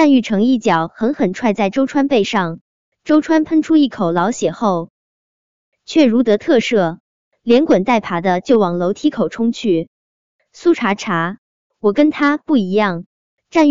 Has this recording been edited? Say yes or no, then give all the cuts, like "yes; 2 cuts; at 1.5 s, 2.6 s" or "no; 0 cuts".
no; 0 cuts